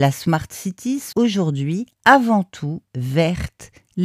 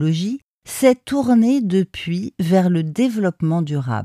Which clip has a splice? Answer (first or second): first